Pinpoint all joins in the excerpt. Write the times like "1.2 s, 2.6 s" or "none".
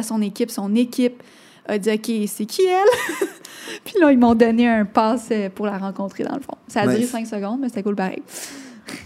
none

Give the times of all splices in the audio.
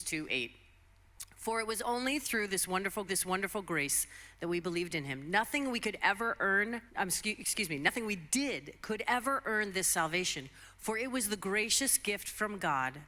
3.1 s, 6.9 s

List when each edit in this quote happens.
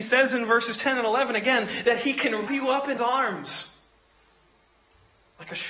2.5 s, 3.0 s

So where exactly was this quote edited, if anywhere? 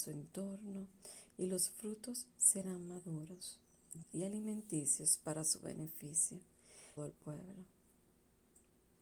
4.0 s, 7.0 s

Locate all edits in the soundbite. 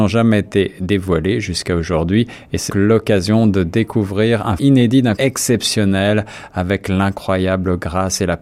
2.7 s, 4.6 s, 5.2 s

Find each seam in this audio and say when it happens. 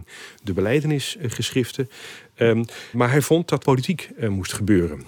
2.9 s, 3.6 s

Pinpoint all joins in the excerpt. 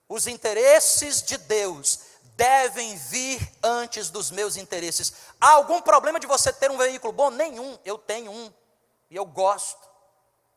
none

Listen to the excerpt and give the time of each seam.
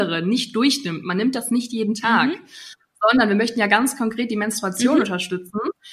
none

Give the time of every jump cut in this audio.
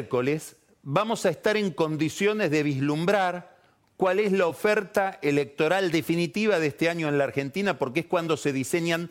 none

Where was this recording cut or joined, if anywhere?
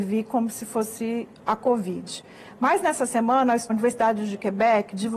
3.7 s

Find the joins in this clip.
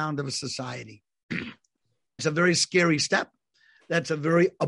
2.2 s

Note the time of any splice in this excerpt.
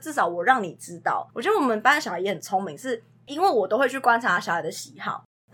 1.3 s

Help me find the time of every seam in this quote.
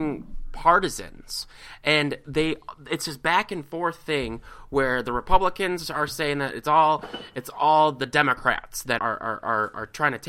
9.0 s

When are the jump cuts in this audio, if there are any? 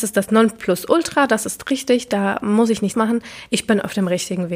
2.9 s

